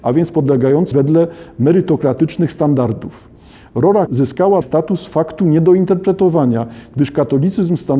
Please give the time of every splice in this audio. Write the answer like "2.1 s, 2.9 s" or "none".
0.9 s, 4.1 s, 4.6 s